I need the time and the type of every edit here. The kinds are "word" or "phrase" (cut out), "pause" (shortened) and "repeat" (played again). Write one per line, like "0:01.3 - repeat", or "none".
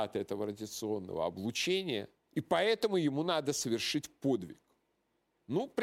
0:02.2 - pause